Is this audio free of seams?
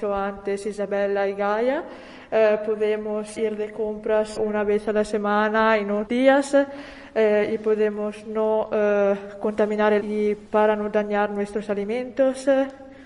no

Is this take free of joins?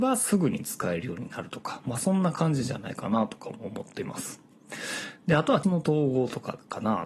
no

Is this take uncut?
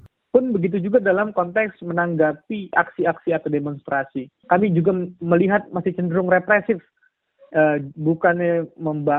yes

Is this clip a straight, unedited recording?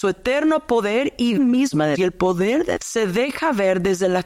no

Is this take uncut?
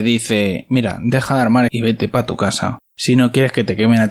no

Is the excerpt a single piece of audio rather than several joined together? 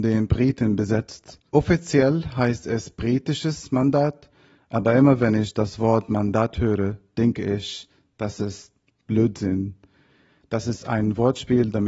no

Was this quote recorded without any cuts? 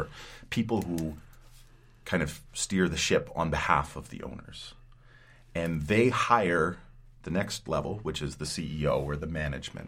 yes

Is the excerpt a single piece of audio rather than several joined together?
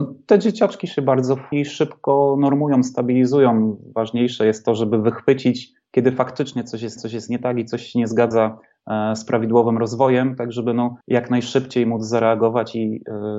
no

